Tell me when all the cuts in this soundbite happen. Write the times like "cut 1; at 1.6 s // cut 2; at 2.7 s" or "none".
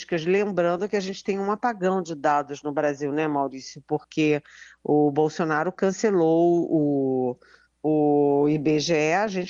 none